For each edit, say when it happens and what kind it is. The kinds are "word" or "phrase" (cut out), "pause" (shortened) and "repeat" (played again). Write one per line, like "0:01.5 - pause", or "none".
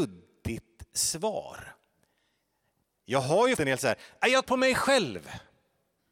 0:03.6 - word
0:04.4 - word